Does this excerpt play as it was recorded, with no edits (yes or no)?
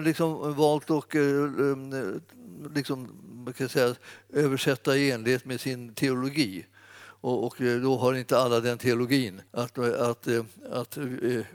no